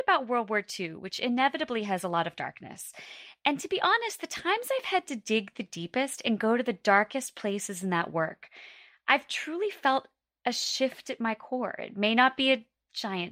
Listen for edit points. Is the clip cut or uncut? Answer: uncut